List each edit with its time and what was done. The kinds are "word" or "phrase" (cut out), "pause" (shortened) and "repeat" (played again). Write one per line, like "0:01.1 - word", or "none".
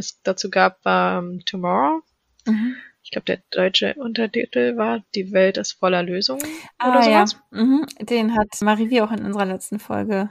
none